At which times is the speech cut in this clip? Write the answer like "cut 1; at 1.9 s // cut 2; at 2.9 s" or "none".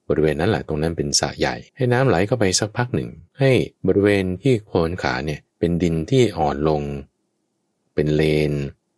cut 1; at 1.7 s // cut 2; at 3.3 s // cut 3; at 3.8 s // cut 4; at 5.5 s

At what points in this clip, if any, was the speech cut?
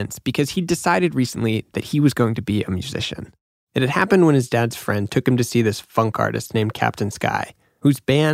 none

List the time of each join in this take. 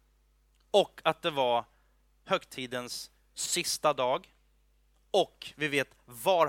none

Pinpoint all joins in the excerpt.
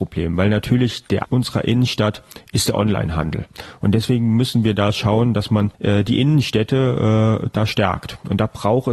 cut 1; at 1.2 s // cut 2; at 5.7 s

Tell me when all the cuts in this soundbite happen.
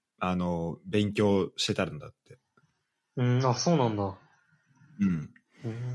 none

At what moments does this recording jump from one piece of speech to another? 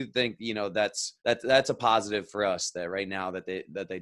cut 1; at 1.2 s

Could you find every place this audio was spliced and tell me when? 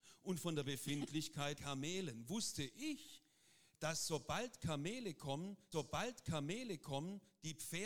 cut 1; at 1.6 s // cut 2; at 5.7 s

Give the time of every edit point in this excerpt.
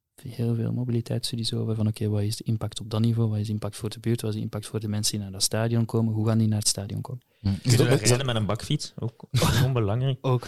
none

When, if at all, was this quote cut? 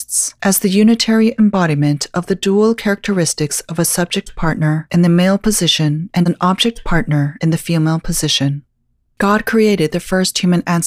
none

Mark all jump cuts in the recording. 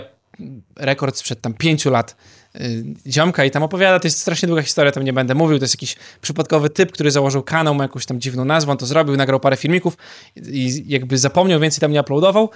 none

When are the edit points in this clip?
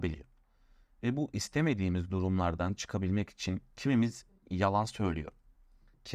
cut 1; at 3.7 s

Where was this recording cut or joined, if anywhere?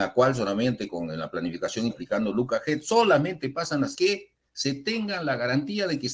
cut 1; at 1.9 s // cut 2; at 3.9 s

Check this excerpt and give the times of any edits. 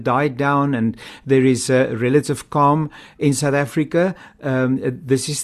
none

